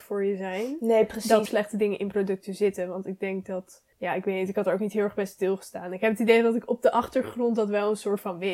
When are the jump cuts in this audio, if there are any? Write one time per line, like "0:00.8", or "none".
0:01.5
0:03.9